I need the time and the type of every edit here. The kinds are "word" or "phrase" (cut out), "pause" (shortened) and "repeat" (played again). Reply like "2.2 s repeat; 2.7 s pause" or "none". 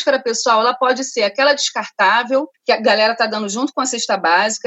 2.5 s pause